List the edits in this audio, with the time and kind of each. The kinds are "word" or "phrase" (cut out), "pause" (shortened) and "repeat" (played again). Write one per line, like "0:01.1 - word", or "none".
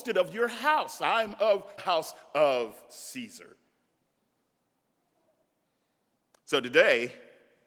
0:01.8 - word